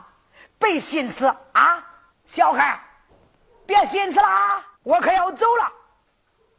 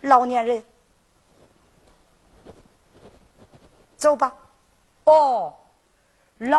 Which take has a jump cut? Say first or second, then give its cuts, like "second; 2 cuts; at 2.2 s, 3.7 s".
first; 3 cuts; at 2.1 s, 3.1 s, 4.7 s